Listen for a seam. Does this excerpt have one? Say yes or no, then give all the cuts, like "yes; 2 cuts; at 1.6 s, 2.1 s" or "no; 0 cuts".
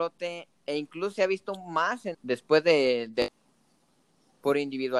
yes; 1 cut; at 2.1 s